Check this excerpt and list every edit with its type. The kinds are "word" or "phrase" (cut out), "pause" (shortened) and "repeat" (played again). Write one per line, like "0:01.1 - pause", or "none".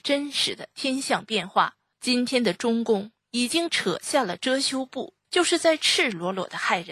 0:01.9 - pause
0:05.2 - pause